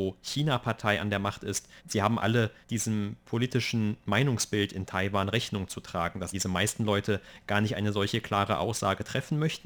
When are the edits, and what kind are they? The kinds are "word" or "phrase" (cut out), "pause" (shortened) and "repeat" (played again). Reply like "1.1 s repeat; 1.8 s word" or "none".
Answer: 1.8 s pause; 2.2 s word; 2.6 s pause; 6.3 s word

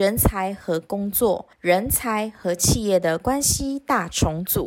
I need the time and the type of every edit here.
1.5 s pause

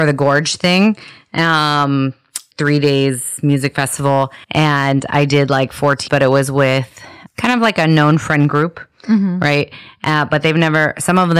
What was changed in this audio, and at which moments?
2.5 s word; 4.4 s pause; 6.1 s word; 7.3 s word

